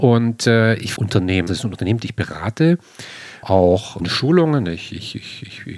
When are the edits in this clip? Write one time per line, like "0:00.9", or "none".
0:01.0
0:01.5
0:03.4
0:04.0